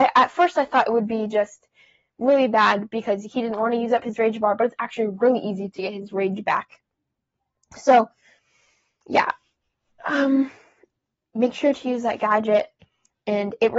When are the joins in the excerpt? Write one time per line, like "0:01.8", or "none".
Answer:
none

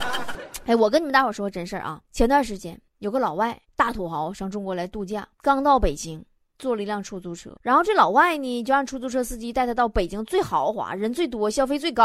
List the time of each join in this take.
0:02.0
0:02.9
0:03.6
0:05.3
0:06.4
0:07.6

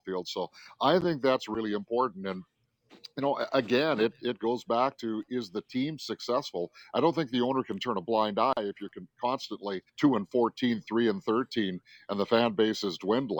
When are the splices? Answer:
0:09.9

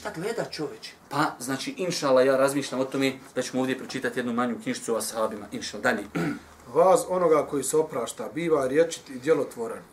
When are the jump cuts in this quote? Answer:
0:01.0

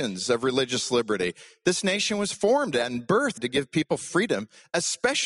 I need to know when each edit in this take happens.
0:03.4

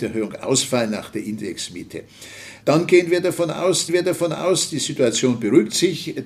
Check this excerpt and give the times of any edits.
0:03.9

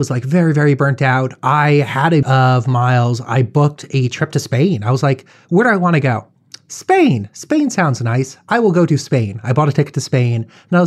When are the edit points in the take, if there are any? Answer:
0:02.2

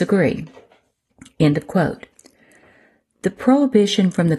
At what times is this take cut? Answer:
none

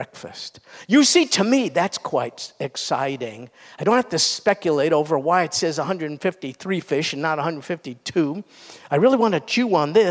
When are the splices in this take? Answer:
none

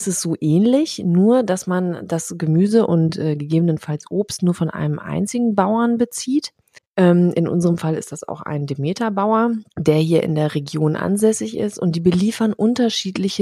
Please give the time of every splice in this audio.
0:06.8
0:09.7

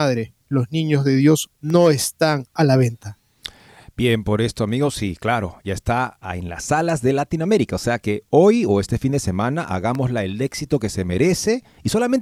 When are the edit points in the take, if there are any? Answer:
none

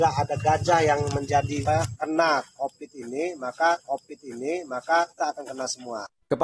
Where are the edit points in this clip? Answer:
0:01.6
0:03.8

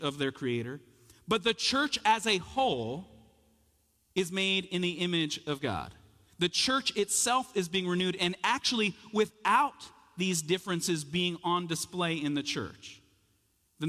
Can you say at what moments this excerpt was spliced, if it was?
none

